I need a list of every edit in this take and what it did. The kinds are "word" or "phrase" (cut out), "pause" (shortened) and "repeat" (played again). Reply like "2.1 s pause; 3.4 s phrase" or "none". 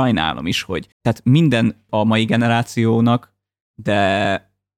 0.9 s pause; 1.9 s phrase